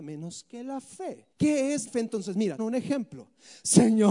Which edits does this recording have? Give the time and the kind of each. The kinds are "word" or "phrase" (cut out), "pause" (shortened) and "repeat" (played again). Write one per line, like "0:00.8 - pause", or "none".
0:01.3 - pause
0:01.9 - word
0:02.6 - phrase